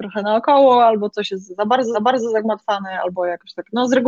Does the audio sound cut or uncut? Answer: cut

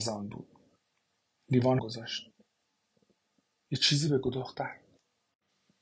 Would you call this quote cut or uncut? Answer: cut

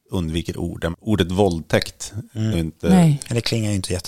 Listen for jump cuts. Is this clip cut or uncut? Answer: cut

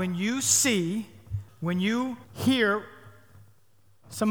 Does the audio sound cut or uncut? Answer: cut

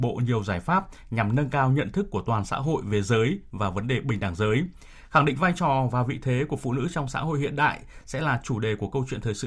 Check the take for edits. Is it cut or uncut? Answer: uncut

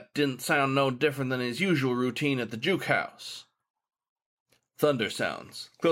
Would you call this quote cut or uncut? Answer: uncut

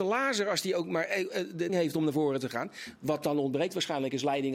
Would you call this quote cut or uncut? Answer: cut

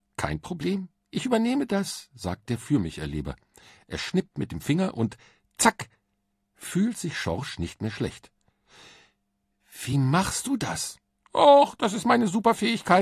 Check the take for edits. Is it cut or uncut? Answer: uncut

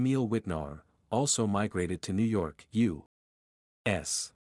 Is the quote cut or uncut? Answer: uncut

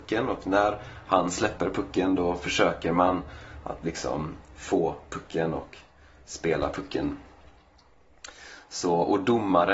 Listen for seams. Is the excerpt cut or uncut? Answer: uncut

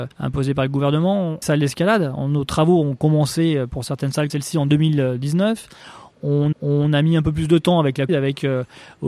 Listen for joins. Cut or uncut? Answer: cut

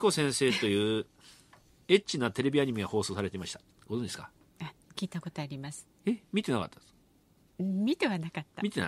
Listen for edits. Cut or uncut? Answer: uncut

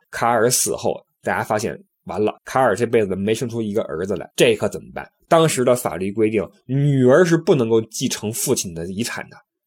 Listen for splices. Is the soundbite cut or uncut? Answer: cut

